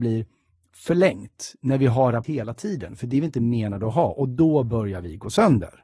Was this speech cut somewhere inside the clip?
yes; 1 cut; at 2.2 s

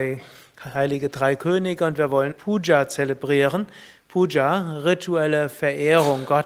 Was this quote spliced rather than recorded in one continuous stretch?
yes; 1 cut; at 2.3 s

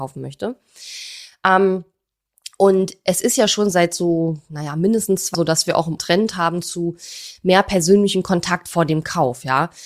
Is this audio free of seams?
no; 2 cuts; at 5.3 s, 6.0 s

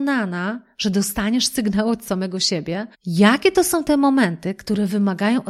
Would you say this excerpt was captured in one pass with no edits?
no; 1 cut; at 2.9 s

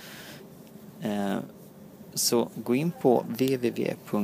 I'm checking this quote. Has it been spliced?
no; 0 cuts

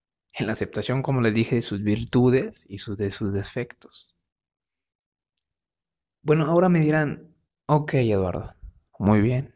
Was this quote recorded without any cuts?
yes; 0 cuts

